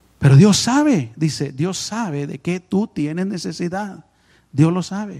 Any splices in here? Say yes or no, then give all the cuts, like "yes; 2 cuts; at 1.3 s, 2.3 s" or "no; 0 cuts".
no; 0 cuts